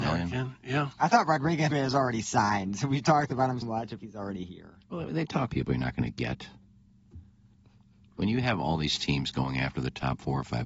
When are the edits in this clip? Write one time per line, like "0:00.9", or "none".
0:01.7
0:03.6
0:04.0
0:05.5